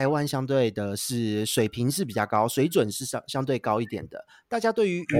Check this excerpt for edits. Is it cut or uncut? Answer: uncut